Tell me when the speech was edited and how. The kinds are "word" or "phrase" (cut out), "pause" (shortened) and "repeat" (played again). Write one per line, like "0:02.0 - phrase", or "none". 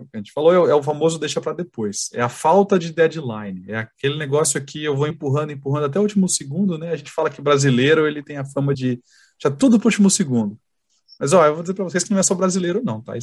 0:05.1 - word
0:08.7 - word

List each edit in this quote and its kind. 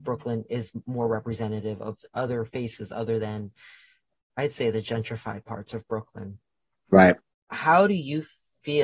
none

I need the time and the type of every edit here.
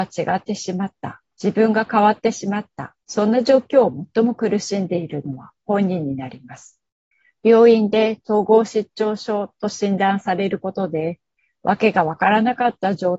0:01.3 - pause
0:03.0 - pause
0:07.1 - pause

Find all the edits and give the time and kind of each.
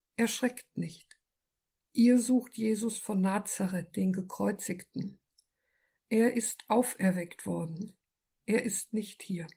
none

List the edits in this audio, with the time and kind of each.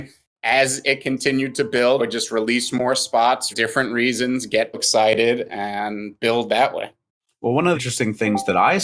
0:02.0 - word
0:03.5 - word
0:04.7 - word
0:07.7 - word

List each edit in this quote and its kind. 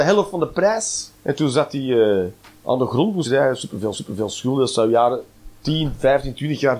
0:01.2 - pause
0:03.2 - phrase
0:03.9 - repeat

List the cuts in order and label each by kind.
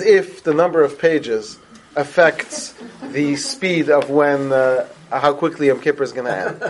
none

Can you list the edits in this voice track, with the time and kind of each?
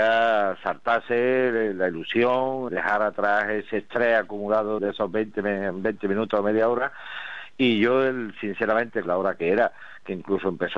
0:02.7 - word
0:04.8 - word
0:09.0 - phrase

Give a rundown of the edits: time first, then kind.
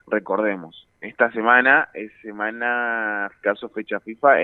0:03.4 - phrase

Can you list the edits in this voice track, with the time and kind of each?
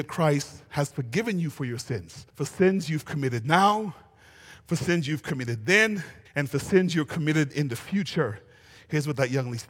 0:02.3 - pause
0:06.2 - pause

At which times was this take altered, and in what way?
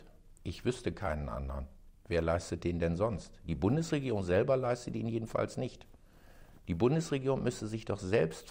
0:02.0 - pause

